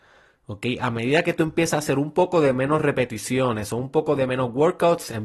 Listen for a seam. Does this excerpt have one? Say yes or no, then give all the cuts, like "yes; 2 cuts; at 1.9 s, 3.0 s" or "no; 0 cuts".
no; 0 cuts